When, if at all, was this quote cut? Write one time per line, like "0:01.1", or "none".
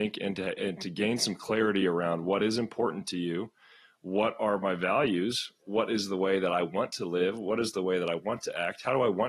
none